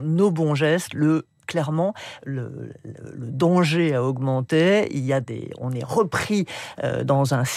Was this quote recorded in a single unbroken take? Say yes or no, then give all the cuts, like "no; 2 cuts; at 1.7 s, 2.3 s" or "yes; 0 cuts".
yes; 0 cuts